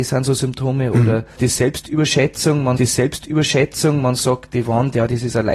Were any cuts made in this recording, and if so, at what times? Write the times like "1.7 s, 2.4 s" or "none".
1.4 s, 2.8 s